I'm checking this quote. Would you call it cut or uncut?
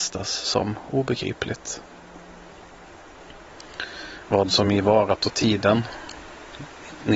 uncut